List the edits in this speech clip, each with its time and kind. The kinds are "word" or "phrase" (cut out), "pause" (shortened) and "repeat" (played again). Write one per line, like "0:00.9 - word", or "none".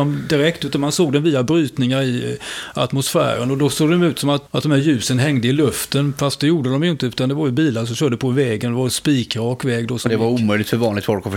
0:04.5 - word